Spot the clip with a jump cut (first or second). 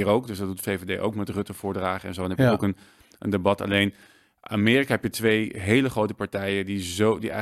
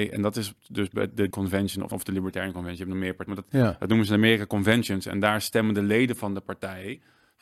second